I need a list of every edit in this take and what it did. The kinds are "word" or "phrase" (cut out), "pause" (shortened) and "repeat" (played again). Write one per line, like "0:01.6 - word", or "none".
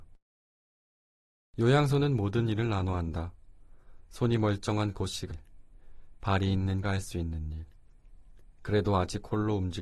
0:05.3 - phrase
0:06.8 - word